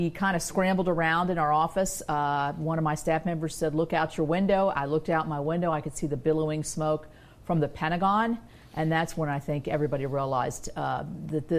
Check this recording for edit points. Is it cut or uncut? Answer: uncut